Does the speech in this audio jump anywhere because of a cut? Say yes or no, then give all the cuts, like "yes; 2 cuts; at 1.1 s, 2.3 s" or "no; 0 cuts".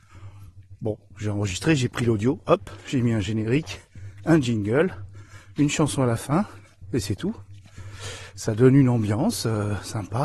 no; 0 cuts